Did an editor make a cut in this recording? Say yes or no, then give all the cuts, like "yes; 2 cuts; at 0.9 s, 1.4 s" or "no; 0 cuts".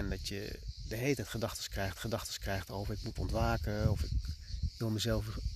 yes; 2 cuts; at 2.0 s, 3.2 s